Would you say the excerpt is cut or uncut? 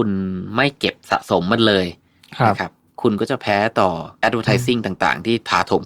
cut